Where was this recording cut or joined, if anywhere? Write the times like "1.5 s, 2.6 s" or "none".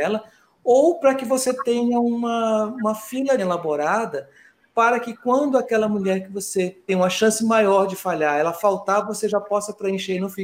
3.4 s, 6.9 s